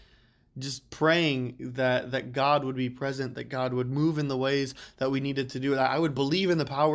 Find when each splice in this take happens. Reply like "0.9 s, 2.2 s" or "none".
none